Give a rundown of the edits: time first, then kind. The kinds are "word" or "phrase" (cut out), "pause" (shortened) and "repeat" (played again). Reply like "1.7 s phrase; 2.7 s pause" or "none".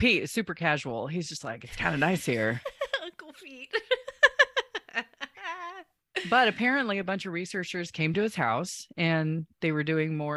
none